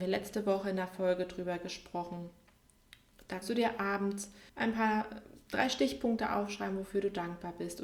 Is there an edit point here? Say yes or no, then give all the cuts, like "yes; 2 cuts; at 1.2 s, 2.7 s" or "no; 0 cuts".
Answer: yes; 2 cuts; at 3.4 s, 4.5 s